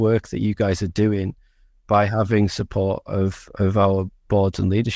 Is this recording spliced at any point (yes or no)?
no